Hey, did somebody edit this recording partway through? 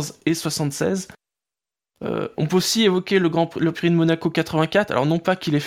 no; 0 cuts

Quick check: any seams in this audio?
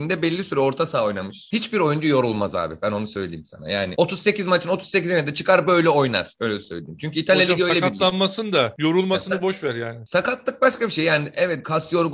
no; 0 cuts

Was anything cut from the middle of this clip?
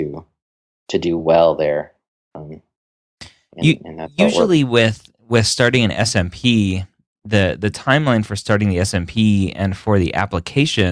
no; 0 cuts

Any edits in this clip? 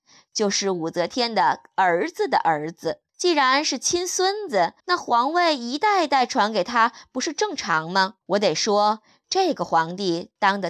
yes; 3 cuts; at 3.1 s, 4.8 s, 8.2 s

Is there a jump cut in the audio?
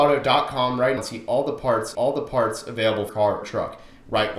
yes; 4 cuts; at 1.0 s, 1.9 s, 3.1 s, 3.4 s

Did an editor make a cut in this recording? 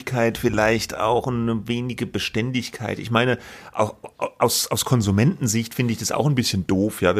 no; 0 cuts

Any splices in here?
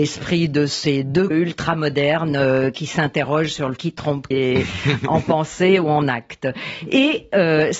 yes; 3 cuts; at 1.3 s, 3.8 s, 4.3 s

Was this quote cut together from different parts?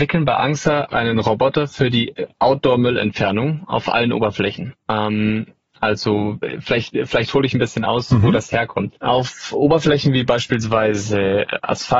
no; 0 cuts

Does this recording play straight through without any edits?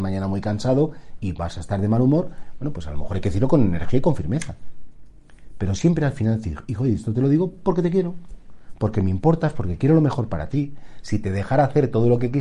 yes; 0 cuts

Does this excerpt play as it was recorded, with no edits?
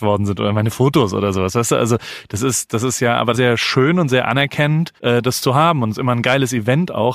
no; 2 cuts; at 3.3 s, 5.0 s

